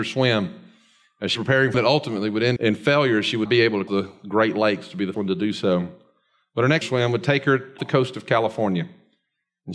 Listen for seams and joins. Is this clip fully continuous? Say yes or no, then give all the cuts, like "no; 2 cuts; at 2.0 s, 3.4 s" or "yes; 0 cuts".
no; 8 cuts; at 1.3 s, 1.7 s, 2.6 s, 3.5 s, 3.9 s, 5.1 s, 6.8 s, 7.8 s